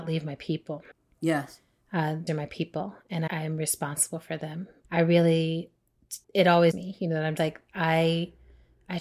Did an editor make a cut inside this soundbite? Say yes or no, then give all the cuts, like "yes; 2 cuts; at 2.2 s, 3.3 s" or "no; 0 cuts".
yes; 7 cuts; at 0.9 s, 2.3 s, 3.3 s, 4.8 s, 6.2 s, 6.7 s, 7.4 s